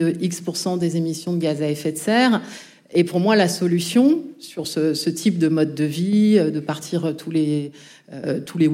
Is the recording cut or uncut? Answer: uncut